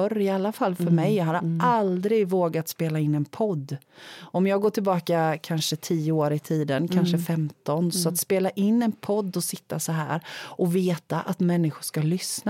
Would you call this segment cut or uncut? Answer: uncut